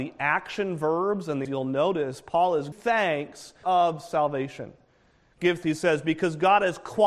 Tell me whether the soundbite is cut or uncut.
cut